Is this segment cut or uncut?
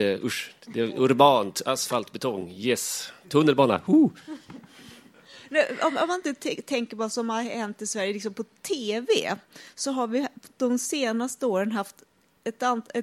uncut